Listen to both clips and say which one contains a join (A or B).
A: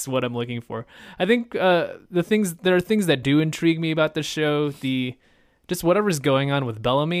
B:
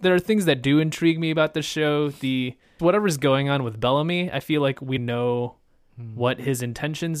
B